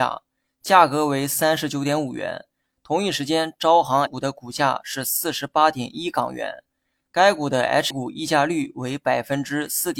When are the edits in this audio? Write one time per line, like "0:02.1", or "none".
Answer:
0:04.1
0:07.9